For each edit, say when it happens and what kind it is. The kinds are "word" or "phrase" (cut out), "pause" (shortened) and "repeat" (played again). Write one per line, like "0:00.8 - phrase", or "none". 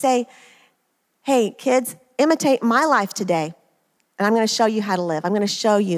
none